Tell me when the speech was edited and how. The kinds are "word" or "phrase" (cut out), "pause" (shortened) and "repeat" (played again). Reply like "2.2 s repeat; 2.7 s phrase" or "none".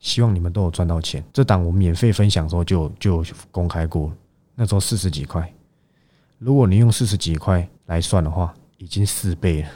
1.3 s pause; 7.8 s pause